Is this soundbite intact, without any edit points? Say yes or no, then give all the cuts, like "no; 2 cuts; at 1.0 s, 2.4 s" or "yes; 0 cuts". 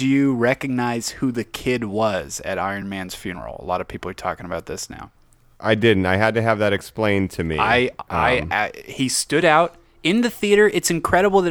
yes; 0 cuts